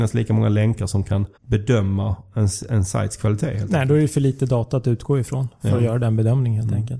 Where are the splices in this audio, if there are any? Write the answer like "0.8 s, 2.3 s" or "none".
1.4 s